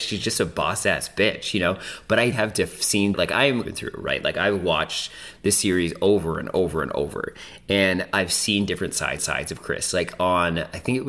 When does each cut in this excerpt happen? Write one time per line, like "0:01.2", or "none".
0:02.3
0:03.1
0:03.7
0:09.2